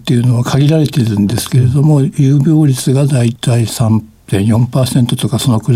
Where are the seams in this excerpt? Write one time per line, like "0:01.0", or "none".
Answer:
none